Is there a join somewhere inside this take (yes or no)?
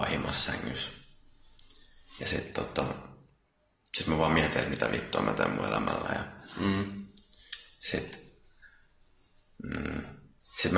no